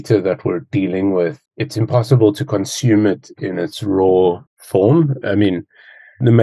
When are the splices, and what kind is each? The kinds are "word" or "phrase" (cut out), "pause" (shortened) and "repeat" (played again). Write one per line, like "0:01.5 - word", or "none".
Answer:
0:01.5 - pause
0:04.5 - pause